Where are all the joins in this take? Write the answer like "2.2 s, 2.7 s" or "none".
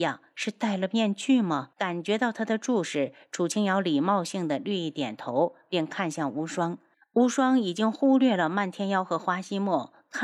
1.7 s, 6.9 s

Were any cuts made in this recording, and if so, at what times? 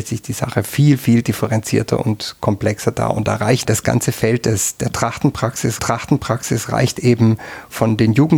3.6 s, 5.8 s

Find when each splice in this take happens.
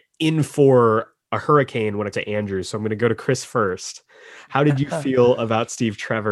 2.1 s

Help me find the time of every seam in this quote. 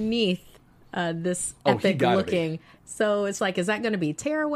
3.4 s

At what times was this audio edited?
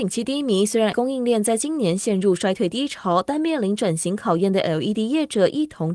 0.9 s

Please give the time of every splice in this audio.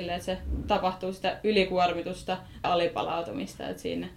2.6 s

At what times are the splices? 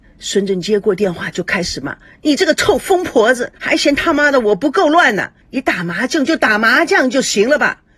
3.6 s, 5.4 s

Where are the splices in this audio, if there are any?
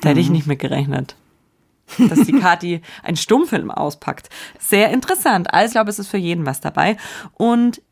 5.7 s

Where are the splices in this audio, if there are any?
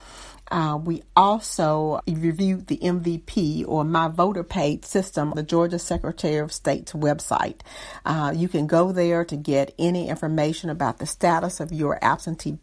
2.0 s, 5.3 s

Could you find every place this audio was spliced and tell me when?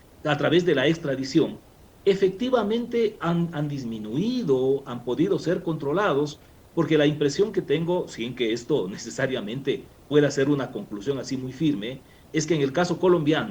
none

